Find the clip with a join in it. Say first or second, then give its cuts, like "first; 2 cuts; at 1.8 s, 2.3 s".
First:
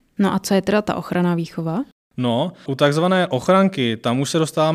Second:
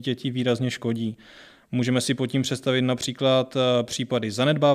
first; 1 cut; at 2.7 s